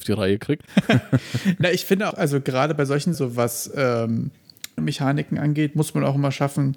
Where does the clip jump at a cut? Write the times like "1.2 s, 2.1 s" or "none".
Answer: 2.1 s, 3.1 s, 4.8 s